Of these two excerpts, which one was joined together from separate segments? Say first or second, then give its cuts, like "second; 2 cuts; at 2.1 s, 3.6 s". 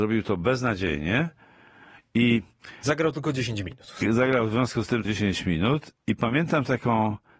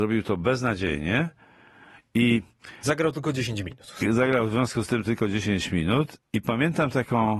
first; 1 cut; at 5.0 s